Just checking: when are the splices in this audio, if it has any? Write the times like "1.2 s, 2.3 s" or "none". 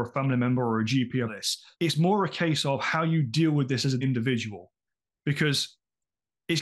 1.3 s, 1.7 s, 4.0 s